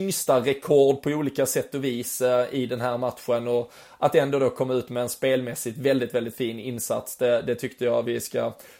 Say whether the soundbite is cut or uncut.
uncut